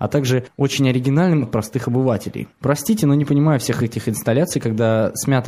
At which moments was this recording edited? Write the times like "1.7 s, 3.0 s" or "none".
1.4 s